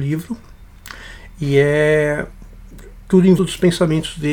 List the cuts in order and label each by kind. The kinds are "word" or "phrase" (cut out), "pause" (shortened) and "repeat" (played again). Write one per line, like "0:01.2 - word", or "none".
0:03.4 - word